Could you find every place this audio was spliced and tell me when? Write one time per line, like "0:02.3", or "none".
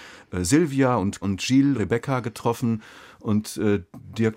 0:01.2
0:01.8